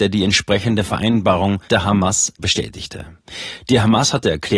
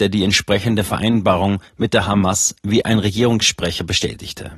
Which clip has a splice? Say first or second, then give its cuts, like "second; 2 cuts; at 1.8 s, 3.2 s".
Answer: first; 2 cuts; at 1.7 s, 2.4 s